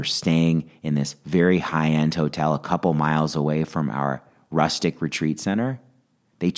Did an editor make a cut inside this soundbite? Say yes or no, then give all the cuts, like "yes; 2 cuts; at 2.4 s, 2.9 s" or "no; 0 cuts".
no; 0 cuts